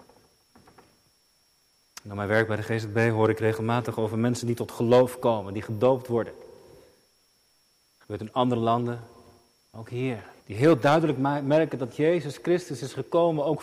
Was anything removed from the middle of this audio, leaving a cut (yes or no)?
yes